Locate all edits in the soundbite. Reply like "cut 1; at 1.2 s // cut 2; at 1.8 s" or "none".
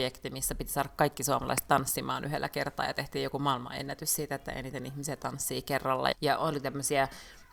cut 1; at 6.1 s